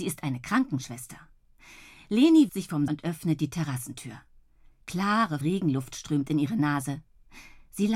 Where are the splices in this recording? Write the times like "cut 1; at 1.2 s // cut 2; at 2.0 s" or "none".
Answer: cut 1; at 2.5 s // cut 2; at 2.9 s // cut 3; at 5.4 s